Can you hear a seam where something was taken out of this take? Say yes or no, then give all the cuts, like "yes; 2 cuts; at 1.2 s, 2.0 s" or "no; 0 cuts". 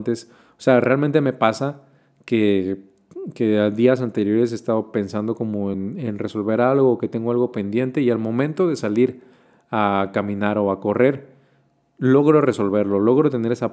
no; 0 cuts